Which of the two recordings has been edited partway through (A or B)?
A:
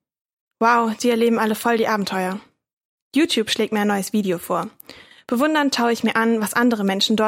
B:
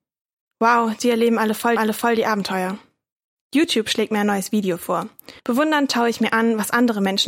B